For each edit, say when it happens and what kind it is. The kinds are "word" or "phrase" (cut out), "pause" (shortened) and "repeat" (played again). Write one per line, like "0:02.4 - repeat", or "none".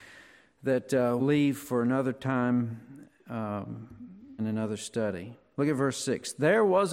0:01.2 - word
0:04.4 - word